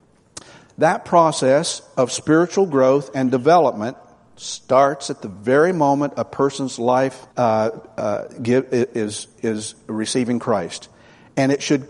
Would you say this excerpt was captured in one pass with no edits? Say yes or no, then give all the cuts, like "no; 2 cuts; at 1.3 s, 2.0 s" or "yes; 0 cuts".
no; 1 cut; at 7.3 s